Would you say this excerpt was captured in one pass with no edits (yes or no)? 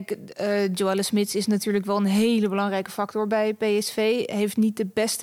yes